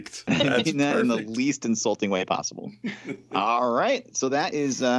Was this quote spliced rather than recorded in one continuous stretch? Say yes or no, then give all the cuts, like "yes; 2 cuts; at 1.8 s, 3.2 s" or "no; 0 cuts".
no; 0 cuts